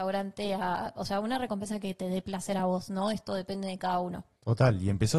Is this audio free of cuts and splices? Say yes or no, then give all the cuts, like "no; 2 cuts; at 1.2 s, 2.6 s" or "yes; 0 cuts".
yes; 0 cuts